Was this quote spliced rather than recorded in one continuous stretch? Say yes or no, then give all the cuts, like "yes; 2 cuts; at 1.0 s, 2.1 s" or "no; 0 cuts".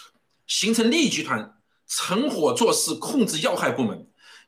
no; 0 cuts